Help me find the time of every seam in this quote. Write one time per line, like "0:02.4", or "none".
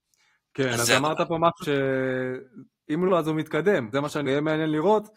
0:01.6
0:03.1
0:03.9
0:04.2